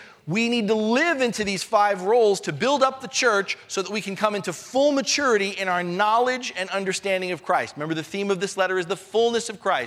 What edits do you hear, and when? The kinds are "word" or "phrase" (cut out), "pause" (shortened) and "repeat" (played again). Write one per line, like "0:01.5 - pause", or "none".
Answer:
none